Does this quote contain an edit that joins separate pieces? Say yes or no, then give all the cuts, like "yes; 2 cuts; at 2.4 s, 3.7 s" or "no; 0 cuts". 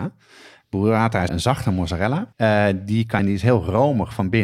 yes; 3 cuts; at 1.3 s, 2.3 s, 3.2 s